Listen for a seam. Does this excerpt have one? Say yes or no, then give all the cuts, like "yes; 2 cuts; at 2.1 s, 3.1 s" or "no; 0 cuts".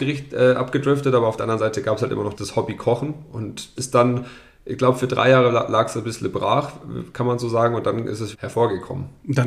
yes; 3 cuts; at 2.3 s, 3.8 s, 8.3 s